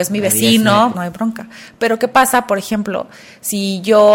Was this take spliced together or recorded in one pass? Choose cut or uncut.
cut